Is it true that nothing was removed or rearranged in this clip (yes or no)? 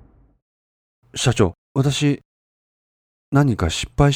no